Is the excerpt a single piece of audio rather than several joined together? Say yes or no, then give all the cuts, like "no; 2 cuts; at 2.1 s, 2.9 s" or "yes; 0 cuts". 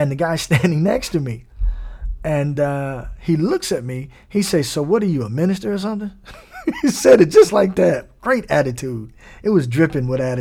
yes; 0 cuts